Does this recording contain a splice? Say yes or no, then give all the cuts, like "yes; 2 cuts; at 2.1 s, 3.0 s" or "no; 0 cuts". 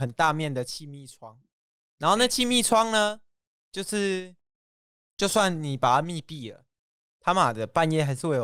no; 0 cuts